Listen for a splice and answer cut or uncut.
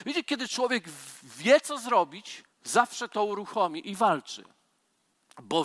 cut